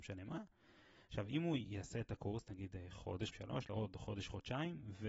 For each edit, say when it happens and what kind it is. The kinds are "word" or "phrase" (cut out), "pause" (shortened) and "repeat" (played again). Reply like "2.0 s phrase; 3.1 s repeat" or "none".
3.3 s word; 3.7 s phrase